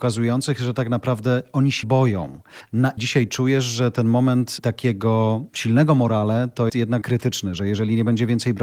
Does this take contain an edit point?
yes; 4 cuts; at 1.8 s, 3.0 s, 6.7 s, 7.0 s

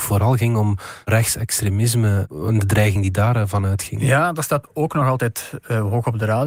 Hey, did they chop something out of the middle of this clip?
no; 0 cuts

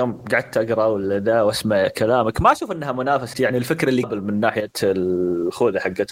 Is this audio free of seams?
no; 2 cuts; at 3.3 s, 4.0 s

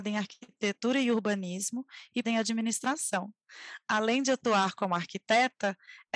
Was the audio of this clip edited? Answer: yes; 1 cut; at 2.2 s

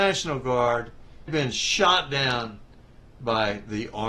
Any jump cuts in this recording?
yes; 1 cut; at 1.3 s

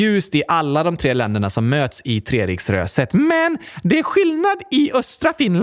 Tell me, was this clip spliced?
no; 0 cuts

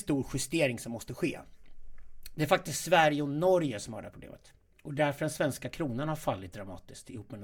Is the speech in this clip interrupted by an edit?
no; 0 cuts

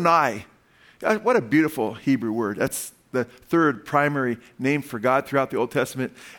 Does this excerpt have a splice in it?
no; 0 cuts

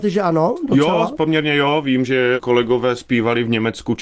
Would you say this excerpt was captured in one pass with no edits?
yes; 0 cuts

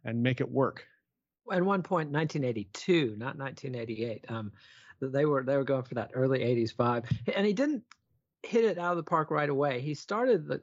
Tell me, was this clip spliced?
no; 0 cuts

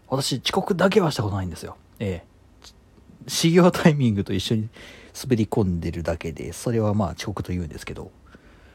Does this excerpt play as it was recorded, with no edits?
yes; 0 cuts

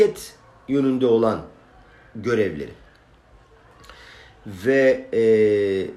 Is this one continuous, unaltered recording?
yes; 0 cuts

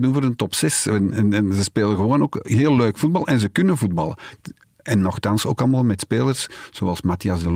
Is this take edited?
no; 0 cuts

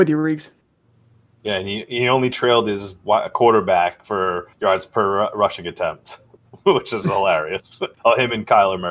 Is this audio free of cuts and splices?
no; 2 cuts; at 4.5 s, 7.9 s

